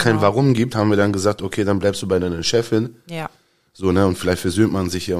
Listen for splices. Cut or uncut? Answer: uncut